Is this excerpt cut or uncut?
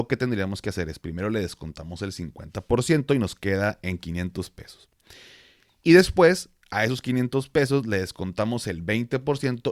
uncut